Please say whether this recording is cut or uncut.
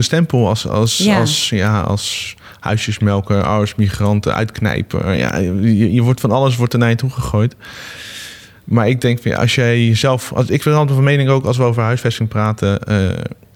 uncut